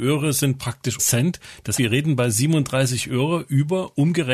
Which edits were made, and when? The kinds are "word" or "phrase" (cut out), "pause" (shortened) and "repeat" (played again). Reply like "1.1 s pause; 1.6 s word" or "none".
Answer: 1.0 s word; 1.8 s word